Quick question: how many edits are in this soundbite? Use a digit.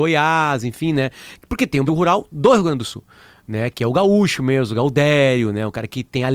1